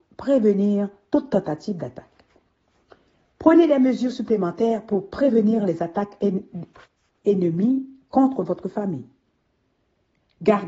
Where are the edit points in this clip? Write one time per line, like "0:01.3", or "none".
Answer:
none